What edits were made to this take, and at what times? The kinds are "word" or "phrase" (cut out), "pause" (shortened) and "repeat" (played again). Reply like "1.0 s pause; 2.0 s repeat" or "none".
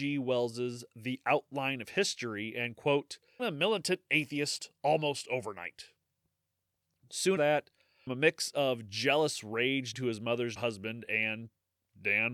3.4 s word; 7.4 s word; 8.1 s word; 9.9 s word; 10.6 s word